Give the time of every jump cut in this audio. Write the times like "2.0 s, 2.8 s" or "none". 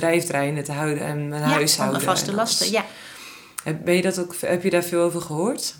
none